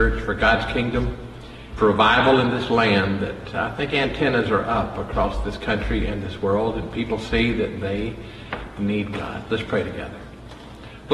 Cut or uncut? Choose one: cut